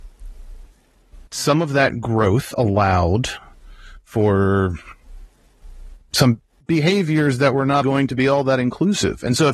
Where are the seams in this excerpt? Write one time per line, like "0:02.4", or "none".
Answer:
0:01.3
0:06.6
0:07.8